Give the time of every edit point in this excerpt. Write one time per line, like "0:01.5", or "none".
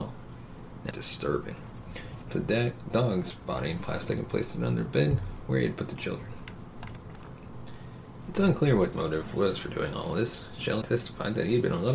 0:00.9
0:02.3
0:08.9
0:10.8